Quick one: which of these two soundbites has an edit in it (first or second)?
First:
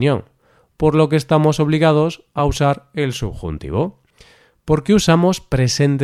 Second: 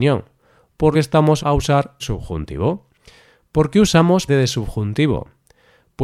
second